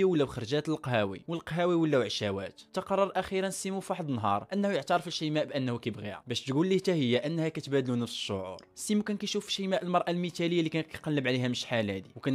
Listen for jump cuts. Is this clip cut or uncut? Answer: uncut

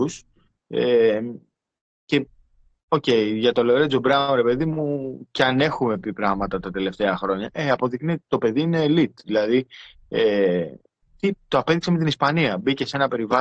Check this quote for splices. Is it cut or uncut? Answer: uncut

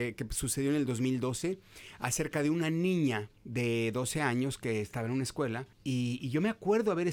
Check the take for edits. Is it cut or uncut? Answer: cut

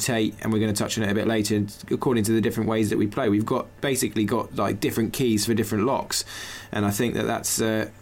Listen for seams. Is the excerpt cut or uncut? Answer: uncut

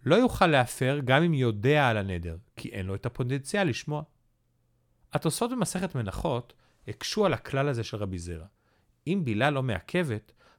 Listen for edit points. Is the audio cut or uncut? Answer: uncut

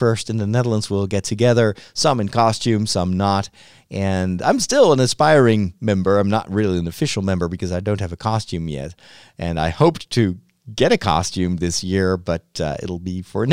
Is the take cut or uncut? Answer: uncut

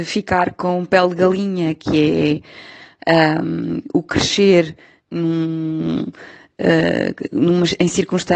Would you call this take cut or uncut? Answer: uncut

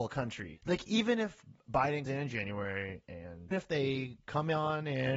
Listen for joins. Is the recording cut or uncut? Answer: cut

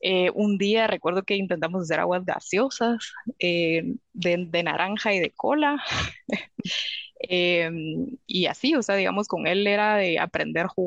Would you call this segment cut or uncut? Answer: cut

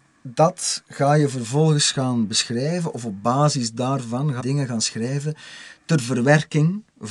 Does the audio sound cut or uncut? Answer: cut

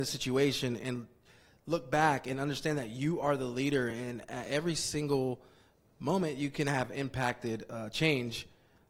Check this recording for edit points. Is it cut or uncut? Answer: uncut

